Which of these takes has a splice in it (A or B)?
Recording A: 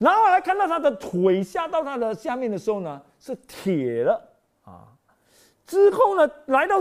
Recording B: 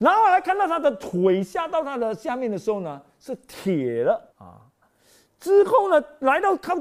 B